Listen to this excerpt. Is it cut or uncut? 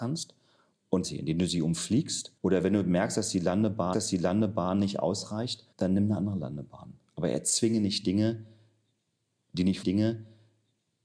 cut